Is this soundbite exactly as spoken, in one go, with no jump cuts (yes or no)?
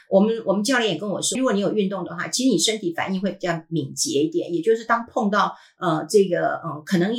no